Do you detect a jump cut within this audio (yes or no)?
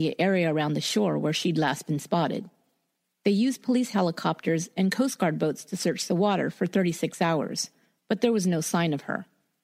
no